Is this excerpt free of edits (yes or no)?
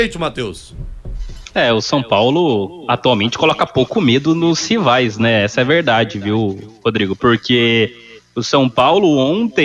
yes